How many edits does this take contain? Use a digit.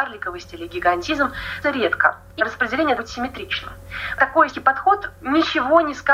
4